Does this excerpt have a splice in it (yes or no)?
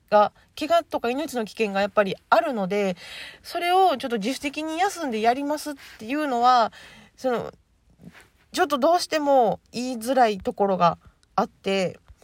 yes